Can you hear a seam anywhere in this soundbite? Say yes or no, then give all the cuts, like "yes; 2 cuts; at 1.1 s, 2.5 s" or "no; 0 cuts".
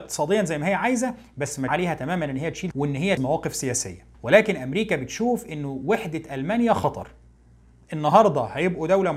yes; 4 cuts; at 1.7 s, 2.7 s, 3.2 s, 4.1 s